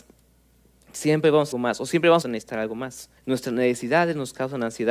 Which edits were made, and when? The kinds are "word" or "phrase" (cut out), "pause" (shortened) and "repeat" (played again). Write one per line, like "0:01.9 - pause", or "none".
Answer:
0:01.5 - phrase
0:02.2 - phrase
0:03.2 - pause

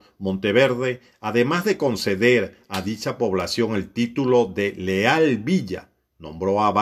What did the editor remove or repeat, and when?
none

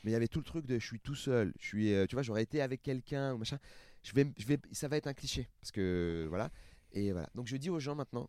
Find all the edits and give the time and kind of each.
none

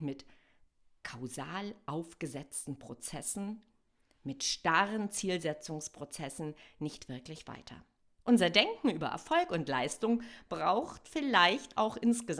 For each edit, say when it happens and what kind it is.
0:08.1 - pause

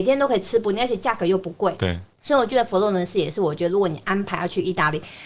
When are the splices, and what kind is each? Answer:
0:02.1 - pause

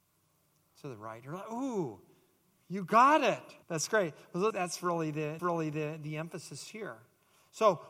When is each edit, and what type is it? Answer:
0:03.6 - pause
0:04.5 - word
0:05.4 - repeat

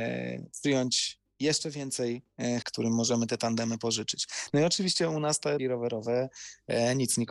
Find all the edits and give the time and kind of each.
0:02.6 - word
0:05.6 - word

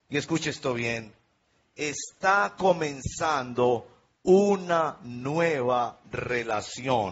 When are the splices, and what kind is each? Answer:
none

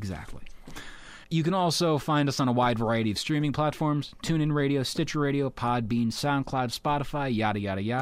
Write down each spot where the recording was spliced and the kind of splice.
0:01.2 - pause

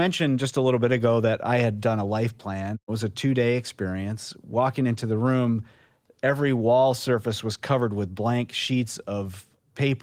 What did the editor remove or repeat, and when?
none

